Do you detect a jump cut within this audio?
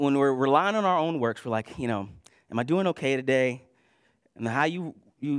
no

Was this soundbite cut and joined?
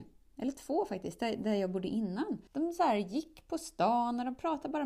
yes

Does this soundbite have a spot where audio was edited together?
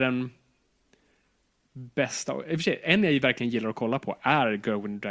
no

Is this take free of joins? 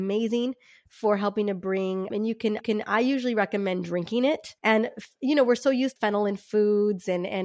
no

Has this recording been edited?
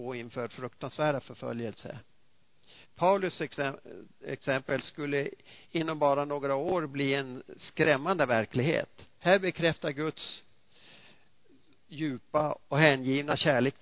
yes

